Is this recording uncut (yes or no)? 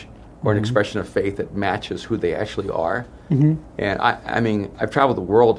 yes